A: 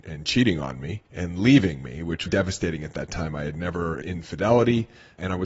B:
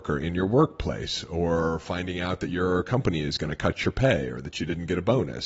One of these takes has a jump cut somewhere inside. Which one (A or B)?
A